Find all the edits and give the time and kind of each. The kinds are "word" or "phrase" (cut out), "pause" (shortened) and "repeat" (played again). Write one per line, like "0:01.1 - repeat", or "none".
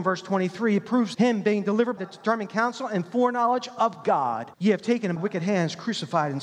0:01.1 - word
0:02.0 - word
0:04.5 - pause
0:05.2 - word